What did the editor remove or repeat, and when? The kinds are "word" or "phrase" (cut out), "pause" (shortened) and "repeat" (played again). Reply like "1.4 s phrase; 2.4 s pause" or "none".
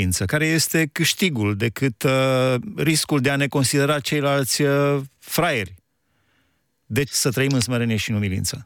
7.1 s word